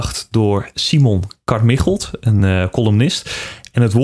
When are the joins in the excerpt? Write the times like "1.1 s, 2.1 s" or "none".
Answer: none